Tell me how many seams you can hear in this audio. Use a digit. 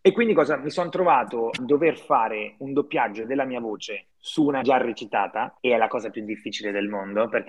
4